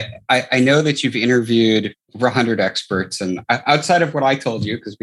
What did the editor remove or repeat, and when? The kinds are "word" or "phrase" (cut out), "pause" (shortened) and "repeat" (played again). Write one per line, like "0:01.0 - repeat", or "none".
0:02.0 - pause